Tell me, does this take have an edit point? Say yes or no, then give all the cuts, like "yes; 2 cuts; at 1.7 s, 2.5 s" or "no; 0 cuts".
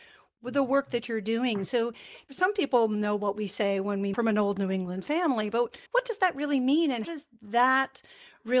yes; 3 cuts; at 4.1 s, 5.9 s, 7.0 s